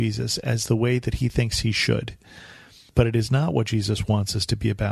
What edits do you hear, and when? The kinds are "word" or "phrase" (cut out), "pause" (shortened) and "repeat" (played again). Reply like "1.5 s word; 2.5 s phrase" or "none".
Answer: none